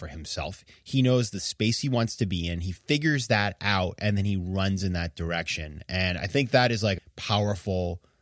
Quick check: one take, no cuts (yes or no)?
no